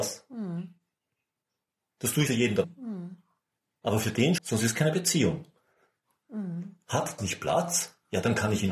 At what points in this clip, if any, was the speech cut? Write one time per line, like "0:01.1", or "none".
0:02.3
0:02.6
0:04.4
0:07.2